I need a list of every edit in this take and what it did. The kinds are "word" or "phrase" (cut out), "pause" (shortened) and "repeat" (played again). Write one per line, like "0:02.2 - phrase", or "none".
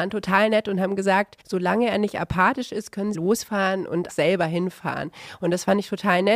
0:01.4 - pause
0:03.1 - phrase
0:04.1 - word